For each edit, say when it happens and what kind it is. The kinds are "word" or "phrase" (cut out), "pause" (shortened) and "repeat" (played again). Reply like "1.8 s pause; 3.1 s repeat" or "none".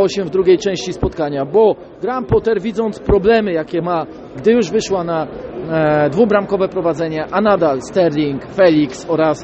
4.4 s word